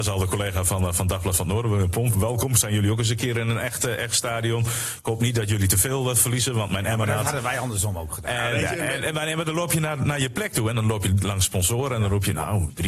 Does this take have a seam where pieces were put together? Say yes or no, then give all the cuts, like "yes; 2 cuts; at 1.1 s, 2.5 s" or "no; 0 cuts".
no; 0 cuts